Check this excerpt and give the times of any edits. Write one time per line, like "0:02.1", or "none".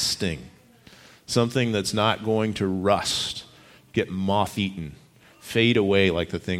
none